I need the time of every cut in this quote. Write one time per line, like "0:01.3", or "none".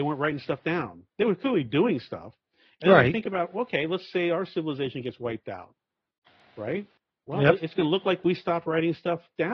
none